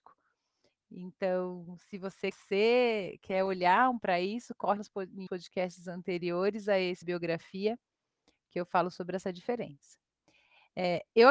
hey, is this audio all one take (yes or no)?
no